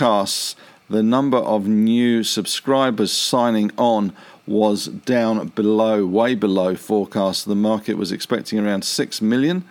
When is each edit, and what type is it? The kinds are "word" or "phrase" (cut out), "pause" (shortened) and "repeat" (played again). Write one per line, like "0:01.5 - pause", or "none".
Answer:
none